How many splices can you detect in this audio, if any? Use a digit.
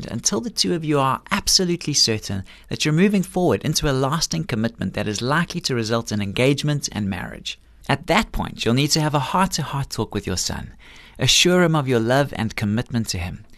0